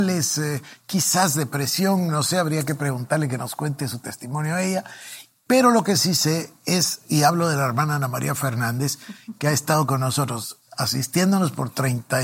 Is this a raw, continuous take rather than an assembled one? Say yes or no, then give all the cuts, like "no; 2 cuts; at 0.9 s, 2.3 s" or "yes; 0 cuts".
yes; 0 cuts